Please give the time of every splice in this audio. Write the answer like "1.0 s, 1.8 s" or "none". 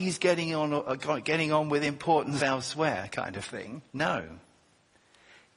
2.4 s, 3.9 s